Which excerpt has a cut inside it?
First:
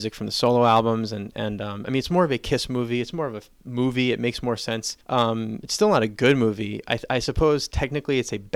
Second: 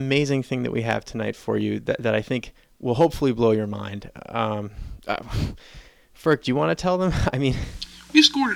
first; 1 cut; at 5.0 s

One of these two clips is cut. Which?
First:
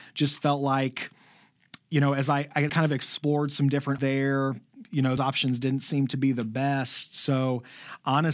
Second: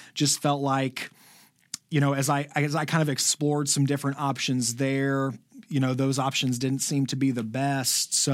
first; 3 cuts; at 2.7 s, 4.0 s, 5.2 s

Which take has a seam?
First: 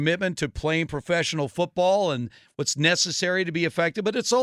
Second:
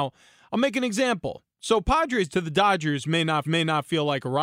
second; 2 cuts; at 2.3 s, 3.4 s

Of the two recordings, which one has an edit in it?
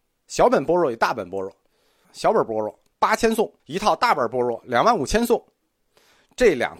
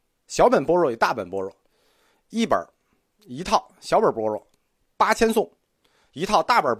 first; 3 cuts; at 2.0 s, 2.9 s, 3.6 s

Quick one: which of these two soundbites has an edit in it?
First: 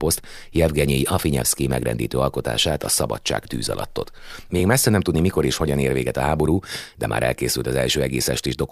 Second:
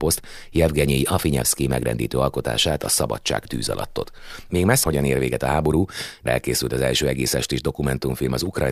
second; 2 cuts; at 4.8 s, 6.3 s

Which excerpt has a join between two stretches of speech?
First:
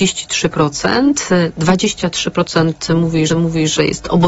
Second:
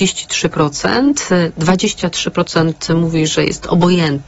first; 1 cut; at 3.3 s

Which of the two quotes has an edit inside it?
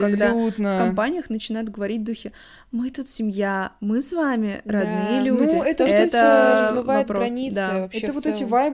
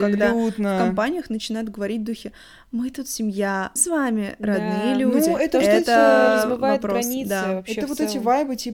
second; 1 cut; at 3.8 s

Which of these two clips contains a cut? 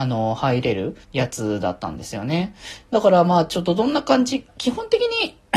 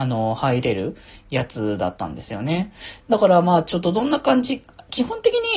first; 2 cuts; at 1.0 s, 4.5 s

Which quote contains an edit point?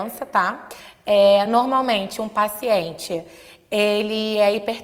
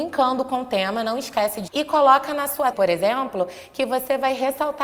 second; 2 cuts; at 1.7 s, 2.7 s

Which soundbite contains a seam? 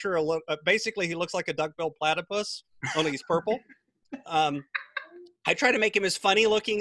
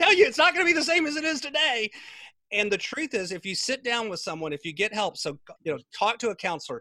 second; 1 cut; at 5.6 s

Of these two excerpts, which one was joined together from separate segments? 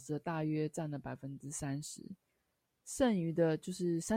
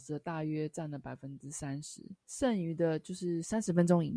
second; 1 cut; at 2.2 s

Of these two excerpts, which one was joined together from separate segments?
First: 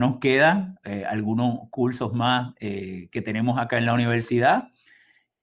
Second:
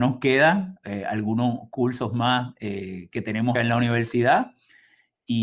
second; 1 cut; at 3.5 s

